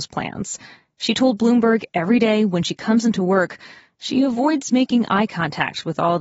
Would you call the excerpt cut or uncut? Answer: uncut